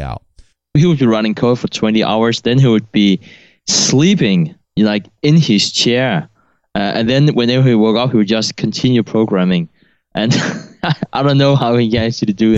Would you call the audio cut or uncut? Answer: uncut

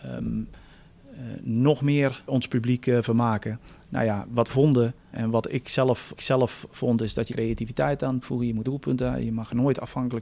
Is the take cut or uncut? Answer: cut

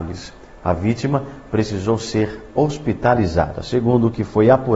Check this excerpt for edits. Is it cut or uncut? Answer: uncut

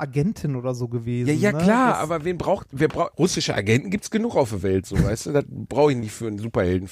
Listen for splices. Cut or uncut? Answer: cut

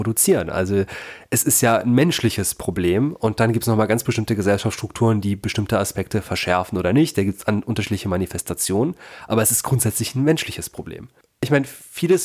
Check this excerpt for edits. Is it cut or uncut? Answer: uncut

